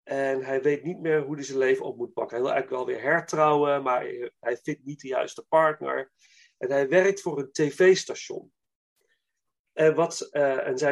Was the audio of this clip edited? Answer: no; 0 cuts

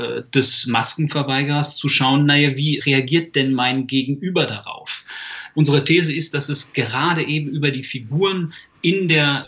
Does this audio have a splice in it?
no; 0 cuts

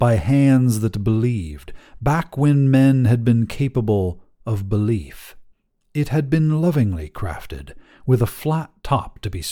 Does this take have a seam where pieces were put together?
yes; 1 cut; at 5.5 s

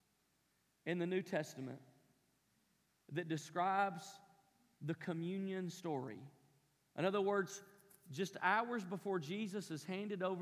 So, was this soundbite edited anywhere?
no; 0 cuts

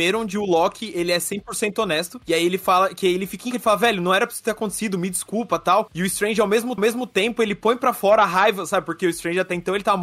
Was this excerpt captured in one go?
no; 2 cuts; at 3.5 s, 6.8 s

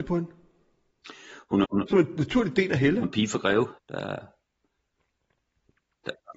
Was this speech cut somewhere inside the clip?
yes; 3 cuts; at 1.6 s, 3.0 s, 3.8 s

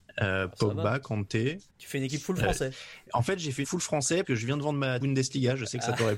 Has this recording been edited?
yes; 4 cuts; at 1.7 s, 3.6 s, 4.2 s, 5.0 s

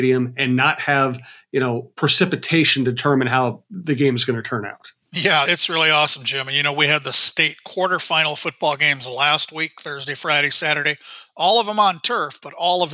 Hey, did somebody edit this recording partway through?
yes; 1 cut; at 5.5 s

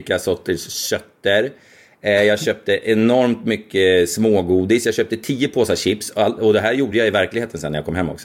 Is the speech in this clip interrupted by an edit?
no; 0 cuts

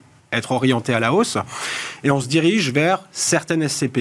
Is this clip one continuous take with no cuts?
yes; 0 cuts

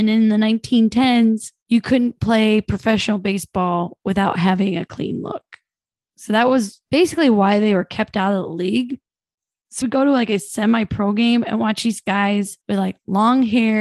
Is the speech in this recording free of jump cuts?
no; 3 cuts; at 1.6 s, 9.8 s, 12.6 s

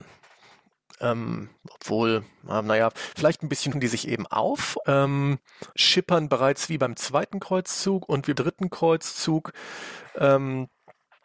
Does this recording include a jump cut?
yes; 5 cuts; at 1.6 s, 3.7 s, 4.8 s, 5.7 s, 8.3 s

